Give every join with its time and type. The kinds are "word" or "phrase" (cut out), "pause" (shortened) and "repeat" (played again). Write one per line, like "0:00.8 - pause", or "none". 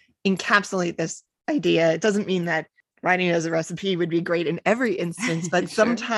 none